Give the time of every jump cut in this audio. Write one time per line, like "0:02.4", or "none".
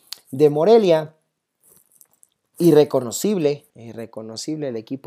0:03.7